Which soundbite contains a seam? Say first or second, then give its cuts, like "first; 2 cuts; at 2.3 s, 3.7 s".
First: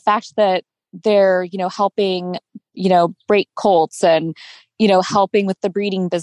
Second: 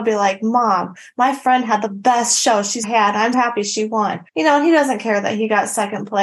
second; 3 cuts; at 2.8 s, 3.3 s, 4.3 s